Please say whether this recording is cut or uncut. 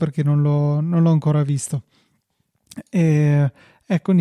uncut